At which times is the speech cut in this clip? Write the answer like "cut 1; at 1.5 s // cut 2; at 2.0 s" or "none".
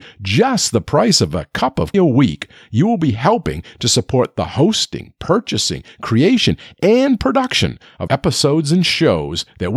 cut 1; at 1.9 s // cut 2; at 8.1 s